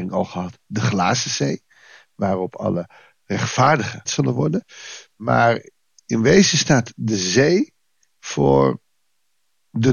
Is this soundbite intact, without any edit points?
no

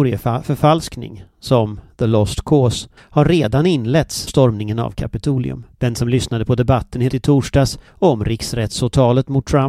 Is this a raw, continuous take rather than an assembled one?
no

